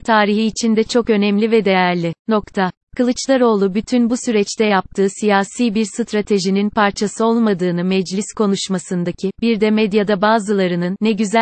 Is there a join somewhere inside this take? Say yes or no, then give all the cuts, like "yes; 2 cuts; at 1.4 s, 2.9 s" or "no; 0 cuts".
yes; 1 cut; at 2.2 s